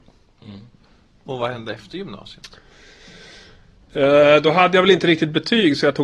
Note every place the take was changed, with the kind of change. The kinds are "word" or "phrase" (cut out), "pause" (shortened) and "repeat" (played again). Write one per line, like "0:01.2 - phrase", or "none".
none